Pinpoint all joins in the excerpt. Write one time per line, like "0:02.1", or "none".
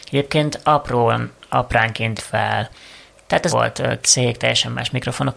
0:02.2
0:03.5
0:04.0